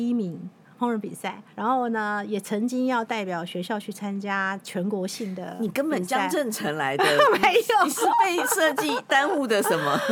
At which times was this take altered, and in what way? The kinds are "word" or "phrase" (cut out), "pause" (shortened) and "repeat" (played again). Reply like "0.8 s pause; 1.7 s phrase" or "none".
1.5 s pause